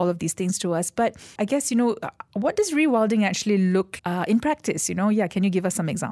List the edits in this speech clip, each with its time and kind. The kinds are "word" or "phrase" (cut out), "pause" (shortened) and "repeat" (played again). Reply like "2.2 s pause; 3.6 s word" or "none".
1.4 s word; 4.0 s word